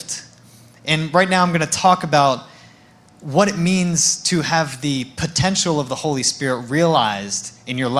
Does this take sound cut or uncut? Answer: uncut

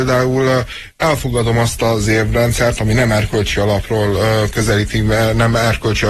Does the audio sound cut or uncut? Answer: uncut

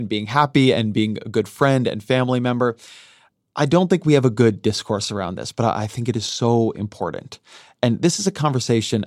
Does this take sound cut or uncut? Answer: uncut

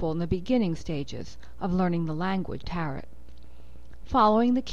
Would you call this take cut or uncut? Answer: cut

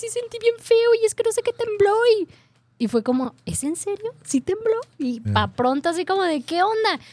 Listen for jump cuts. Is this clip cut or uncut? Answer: uncut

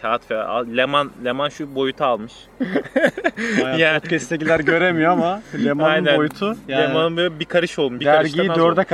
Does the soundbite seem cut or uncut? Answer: uncut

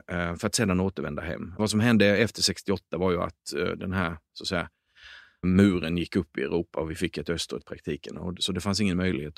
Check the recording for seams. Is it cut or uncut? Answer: cut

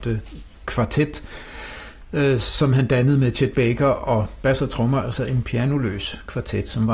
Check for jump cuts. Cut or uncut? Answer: uncut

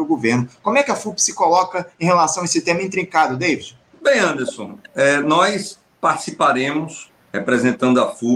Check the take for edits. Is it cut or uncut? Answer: uncut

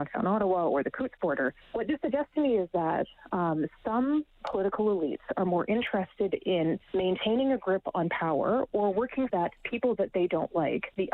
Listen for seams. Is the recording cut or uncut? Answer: cut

